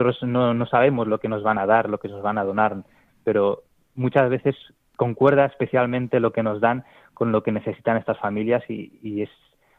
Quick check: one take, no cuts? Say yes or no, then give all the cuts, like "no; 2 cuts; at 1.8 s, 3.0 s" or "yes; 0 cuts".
yes; 0 cuts